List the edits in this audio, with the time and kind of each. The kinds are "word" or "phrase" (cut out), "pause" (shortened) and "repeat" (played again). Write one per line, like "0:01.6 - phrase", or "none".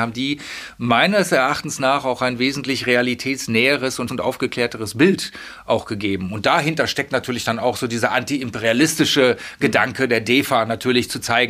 0:04.1 - word